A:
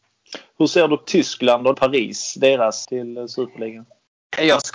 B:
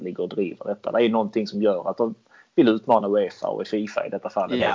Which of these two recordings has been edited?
A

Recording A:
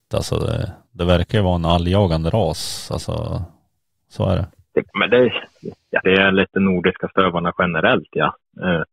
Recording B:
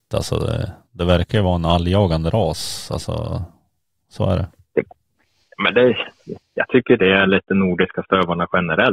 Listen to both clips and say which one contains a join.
A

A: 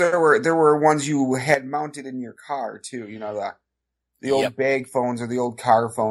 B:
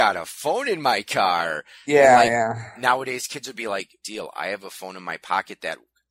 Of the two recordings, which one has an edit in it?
B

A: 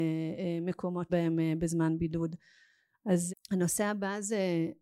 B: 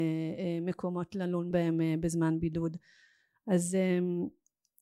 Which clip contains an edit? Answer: A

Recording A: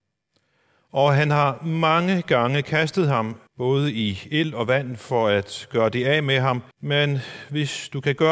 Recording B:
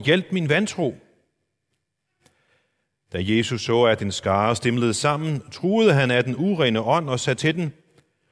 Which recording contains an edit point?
A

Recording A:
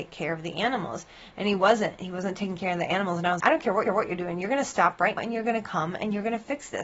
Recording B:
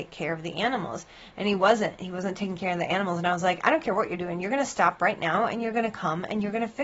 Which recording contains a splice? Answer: A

